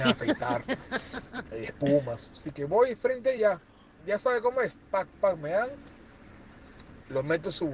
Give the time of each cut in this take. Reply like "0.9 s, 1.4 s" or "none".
none